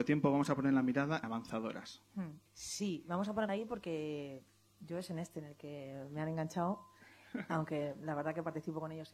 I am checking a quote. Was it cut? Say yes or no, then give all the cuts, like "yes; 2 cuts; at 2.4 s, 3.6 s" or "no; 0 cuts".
yes; 3 cuts; at 1.2 s, 2.5 s, 3.5 s